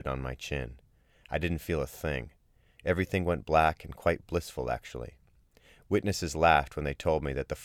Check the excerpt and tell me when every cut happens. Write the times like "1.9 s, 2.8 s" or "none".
none